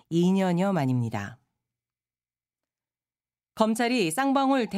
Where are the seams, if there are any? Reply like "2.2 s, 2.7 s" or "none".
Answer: none